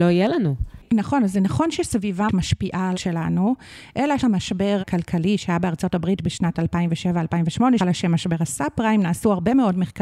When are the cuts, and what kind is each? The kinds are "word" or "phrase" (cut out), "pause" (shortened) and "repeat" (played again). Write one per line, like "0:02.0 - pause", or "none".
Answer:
0:02.3 - word
0:02.9 - word
0:04.2 - word
0:04.8 - word
0:07.8 - word